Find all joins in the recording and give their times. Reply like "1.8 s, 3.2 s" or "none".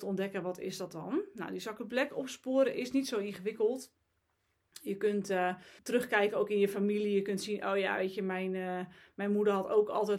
5.8 s